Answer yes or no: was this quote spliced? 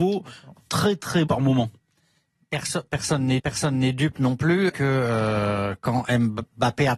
yes